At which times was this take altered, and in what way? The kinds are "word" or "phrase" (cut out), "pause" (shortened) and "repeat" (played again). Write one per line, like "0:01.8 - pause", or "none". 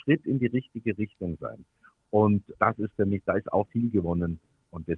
0:02.5 - word
0:03.7 - word